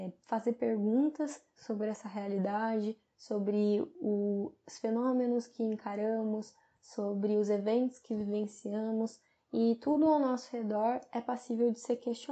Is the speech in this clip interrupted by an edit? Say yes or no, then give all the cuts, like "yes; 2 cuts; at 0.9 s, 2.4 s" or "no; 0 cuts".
no; 0 cuts